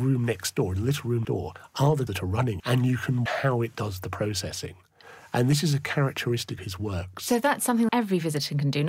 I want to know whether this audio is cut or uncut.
cut